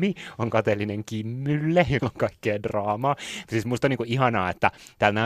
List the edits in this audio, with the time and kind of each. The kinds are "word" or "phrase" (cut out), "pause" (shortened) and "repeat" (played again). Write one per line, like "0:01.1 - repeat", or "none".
0:02.0 - word